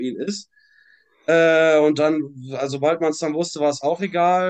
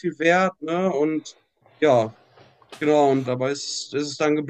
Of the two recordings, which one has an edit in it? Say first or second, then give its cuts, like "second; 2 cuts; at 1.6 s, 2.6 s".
second; 2 cuts; at 1.6 s, 3.2 s